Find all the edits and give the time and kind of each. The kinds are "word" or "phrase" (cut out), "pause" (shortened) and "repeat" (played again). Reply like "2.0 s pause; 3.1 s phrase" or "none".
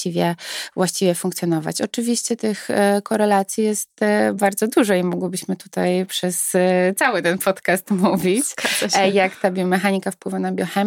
none

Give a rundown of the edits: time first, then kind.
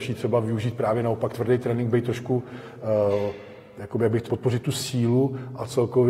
1.3 s word; 4.3 s word

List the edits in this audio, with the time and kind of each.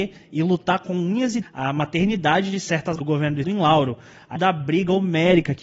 1.4 s word; 3.0 s word; 3.4 s word; 4.4 s word

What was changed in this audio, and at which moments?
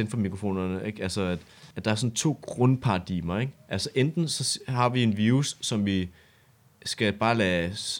1.7 s pause

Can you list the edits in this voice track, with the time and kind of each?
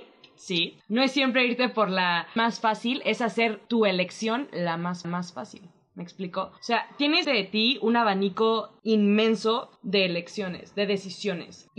2.4 s word; 5.0 s repeat; 6.6 s pause; 7.2 s word

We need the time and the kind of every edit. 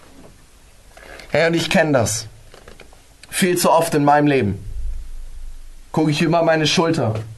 none

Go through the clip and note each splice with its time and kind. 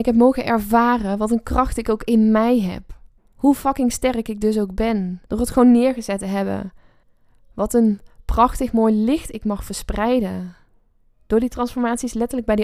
3.2 s pause; 5.2 s pause; 7.0 s pause

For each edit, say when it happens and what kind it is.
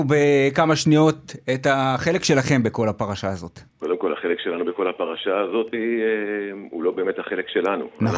3.7 s pause

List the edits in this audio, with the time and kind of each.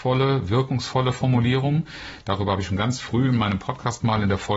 none

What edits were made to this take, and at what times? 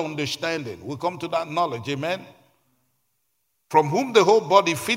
none

